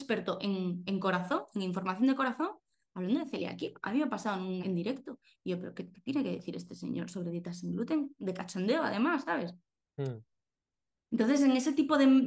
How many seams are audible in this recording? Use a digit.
1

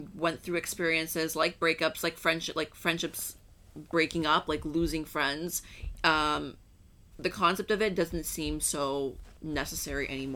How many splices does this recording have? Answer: 1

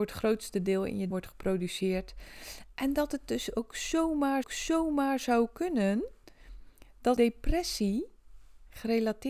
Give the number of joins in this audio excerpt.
3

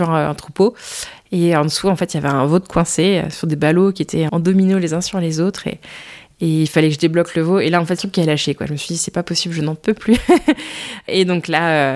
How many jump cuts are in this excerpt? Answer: 2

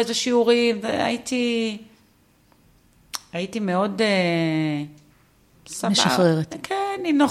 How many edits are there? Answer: 0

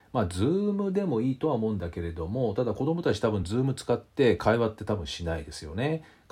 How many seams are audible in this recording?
0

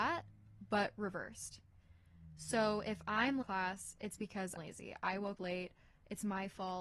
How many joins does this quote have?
3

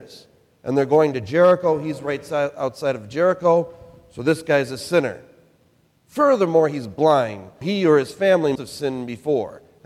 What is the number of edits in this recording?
2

